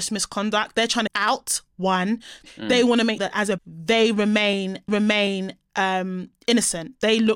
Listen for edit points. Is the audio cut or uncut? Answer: cut